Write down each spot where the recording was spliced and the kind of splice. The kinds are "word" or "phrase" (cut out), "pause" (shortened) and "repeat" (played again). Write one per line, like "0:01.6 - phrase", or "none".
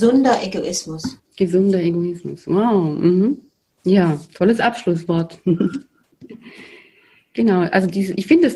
0:01.2 - pause
0:03.7 - pause